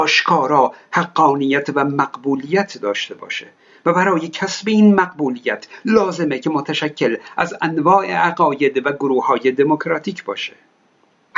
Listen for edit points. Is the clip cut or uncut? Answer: uncut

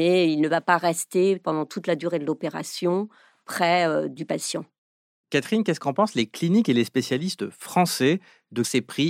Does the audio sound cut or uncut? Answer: uncut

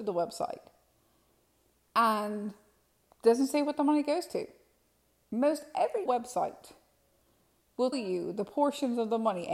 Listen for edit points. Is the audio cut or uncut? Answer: cut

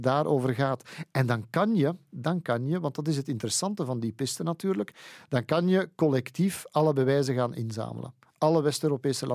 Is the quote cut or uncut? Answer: uncut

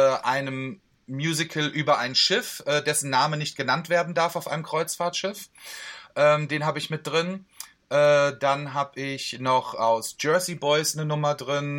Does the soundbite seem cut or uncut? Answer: uncut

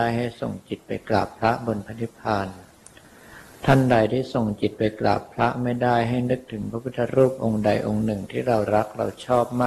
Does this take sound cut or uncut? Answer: uncut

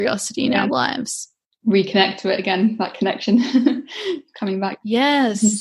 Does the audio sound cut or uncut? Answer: uncut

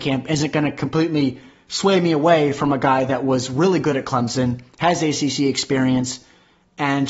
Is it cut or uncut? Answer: uncut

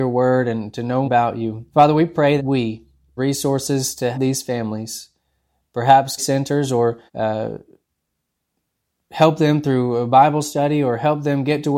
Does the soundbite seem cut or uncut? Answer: cut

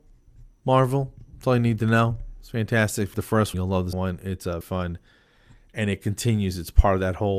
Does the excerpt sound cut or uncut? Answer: cut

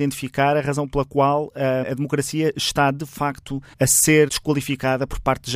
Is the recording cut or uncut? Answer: cut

